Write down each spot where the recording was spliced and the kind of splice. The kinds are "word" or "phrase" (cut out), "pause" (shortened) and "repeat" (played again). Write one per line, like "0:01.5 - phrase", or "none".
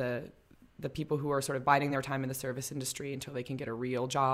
none